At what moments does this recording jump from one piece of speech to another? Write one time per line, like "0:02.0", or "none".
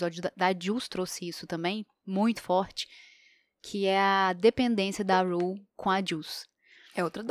none